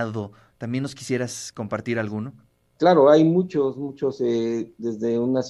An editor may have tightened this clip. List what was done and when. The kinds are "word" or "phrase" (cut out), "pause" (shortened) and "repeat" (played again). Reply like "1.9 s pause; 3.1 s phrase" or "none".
2.5 s pause